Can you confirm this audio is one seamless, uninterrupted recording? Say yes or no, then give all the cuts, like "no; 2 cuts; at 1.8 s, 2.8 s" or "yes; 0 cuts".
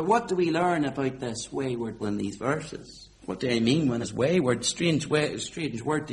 no; 3 cuts; at 2.0 s, 3.2 s, 4.0 s